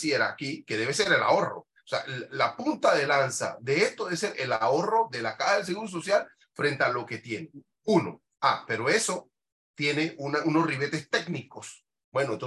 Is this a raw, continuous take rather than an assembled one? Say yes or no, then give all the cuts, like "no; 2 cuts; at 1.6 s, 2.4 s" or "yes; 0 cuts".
yes; 0 cuts